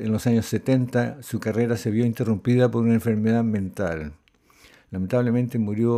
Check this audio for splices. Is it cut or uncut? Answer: uncut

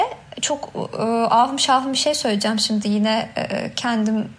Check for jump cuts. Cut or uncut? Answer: uncut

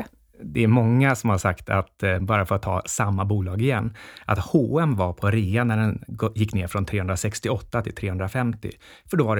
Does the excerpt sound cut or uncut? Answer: uncut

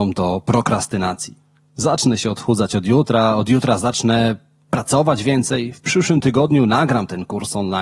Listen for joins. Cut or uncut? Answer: uncut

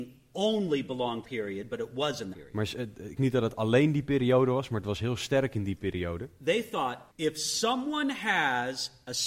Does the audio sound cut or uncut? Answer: cut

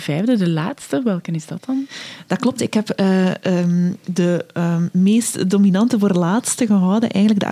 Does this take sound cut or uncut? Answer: uncut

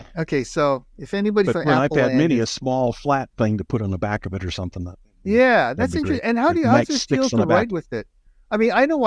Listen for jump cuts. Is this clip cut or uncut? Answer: uncut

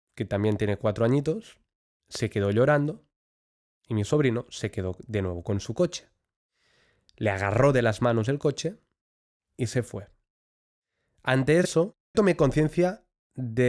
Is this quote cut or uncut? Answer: cut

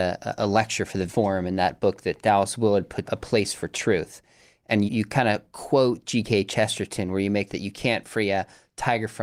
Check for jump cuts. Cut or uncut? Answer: cut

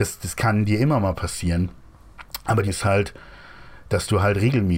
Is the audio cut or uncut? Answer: cut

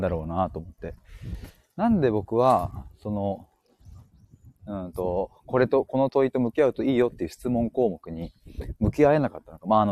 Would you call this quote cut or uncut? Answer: uncut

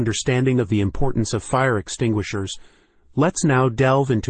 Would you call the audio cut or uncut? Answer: uncut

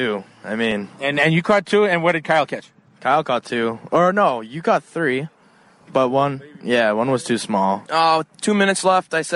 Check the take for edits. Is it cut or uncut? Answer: uncut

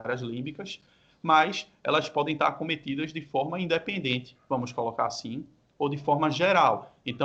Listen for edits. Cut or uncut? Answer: uncut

